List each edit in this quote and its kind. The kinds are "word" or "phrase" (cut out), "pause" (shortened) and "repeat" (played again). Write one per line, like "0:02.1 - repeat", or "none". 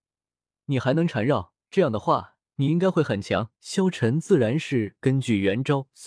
0:01.6 - pause
0:02.5 - pause
0:03.5 - pause